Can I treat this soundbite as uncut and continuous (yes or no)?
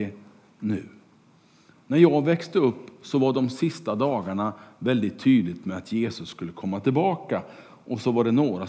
yes